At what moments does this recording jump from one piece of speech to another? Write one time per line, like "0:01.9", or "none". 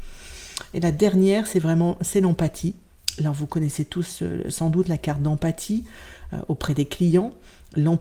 none